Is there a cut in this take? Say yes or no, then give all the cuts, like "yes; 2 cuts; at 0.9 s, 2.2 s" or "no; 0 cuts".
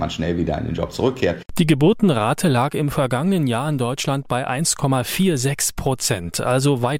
no; 0 cuts